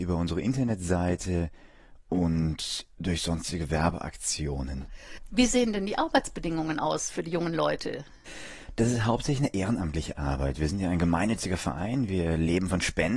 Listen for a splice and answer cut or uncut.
uncut